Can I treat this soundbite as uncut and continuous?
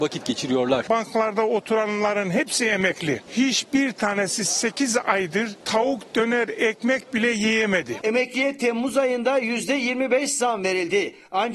yes; 0 cuts

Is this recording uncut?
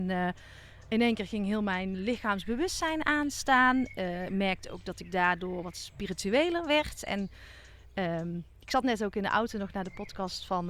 no; 1 cut; at 1.9 s

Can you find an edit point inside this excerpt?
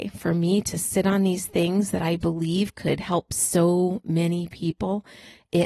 no; 0 cuts

